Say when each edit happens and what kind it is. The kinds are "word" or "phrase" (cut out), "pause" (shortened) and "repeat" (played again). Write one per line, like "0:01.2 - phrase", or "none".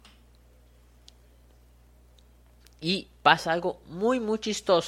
none